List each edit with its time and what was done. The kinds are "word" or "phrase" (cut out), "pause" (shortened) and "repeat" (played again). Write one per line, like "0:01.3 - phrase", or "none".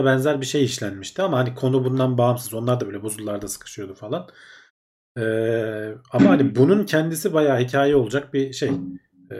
none